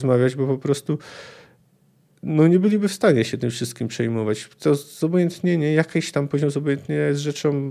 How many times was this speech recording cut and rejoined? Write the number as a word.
zero